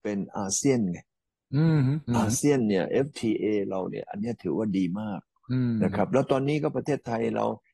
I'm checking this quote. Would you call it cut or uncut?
cut